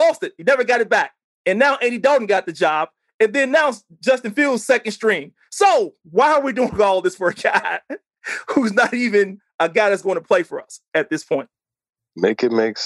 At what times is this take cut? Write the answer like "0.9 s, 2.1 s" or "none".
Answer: 6.0 s